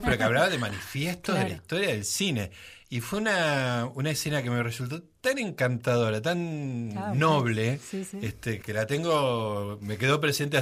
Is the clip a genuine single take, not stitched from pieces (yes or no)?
no